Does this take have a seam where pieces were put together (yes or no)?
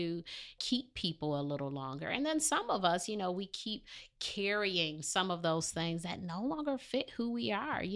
no